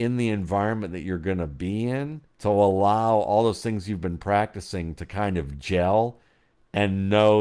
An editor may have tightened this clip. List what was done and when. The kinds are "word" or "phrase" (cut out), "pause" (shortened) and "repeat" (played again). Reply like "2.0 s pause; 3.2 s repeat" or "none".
2.3 s pause